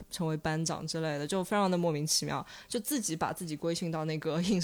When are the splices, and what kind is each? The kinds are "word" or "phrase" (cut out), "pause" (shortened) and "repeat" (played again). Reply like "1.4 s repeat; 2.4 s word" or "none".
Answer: none